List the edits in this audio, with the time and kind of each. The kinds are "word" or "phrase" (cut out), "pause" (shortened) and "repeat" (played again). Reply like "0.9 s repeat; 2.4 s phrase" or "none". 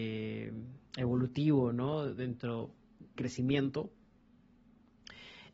3.2 s phrase